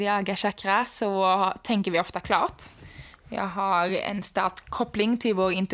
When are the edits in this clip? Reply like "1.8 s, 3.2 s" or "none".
none